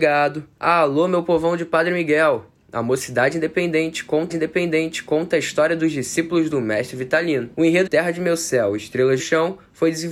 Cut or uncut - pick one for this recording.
cut